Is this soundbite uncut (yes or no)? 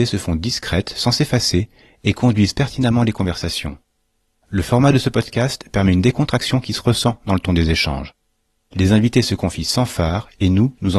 yes